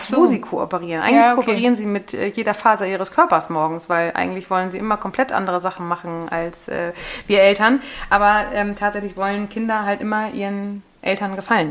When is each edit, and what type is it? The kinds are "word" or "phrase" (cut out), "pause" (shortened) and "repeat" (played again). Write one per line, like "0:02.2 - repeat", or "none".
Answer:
none